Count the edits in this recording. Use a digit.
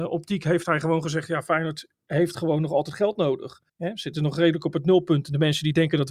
1